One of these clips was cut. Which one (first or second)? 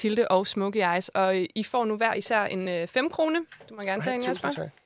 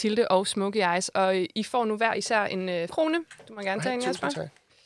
second